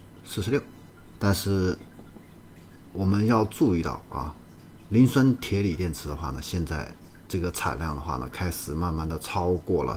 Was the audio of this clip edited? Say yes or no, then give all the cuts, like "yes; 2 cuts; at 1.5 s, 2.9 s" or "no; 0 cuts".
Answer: yes; 1 cut; at 1.1 s